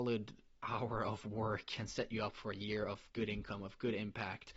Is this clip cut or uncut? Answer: uncut